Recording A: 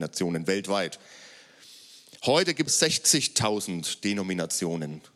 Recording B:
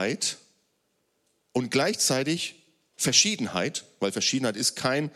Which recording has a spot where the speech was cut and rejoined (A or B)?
A